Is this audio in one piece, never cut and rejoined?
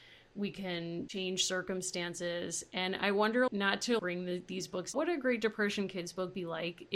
no; 3 cuts; at 3.5 s, 4.0 s, 4.9 s

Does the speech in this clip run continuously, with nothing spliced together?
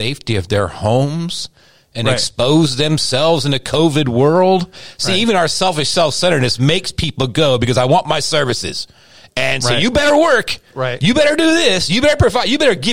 yes; 0 cuts

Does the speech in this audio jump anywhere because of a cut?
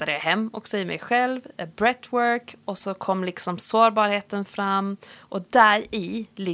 no; 0 cuts

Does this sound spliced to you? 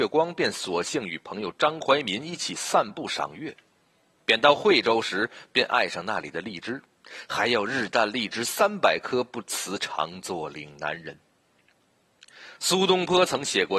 no; 0 cuts

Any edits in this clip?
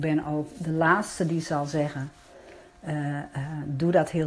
no; 0 cuts

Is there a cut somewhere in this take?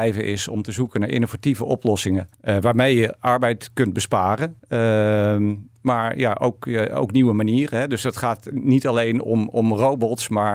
yes; 2 cuts; at 2.3 s, 4.6 s

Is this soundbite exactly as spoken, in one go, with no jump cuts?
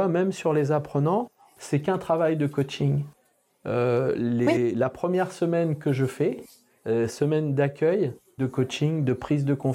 no; 2 cuts; at 7.1 s, 8.4 s

